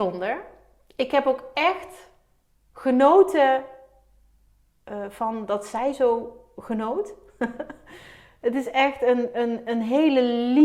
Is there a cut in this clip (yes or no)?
no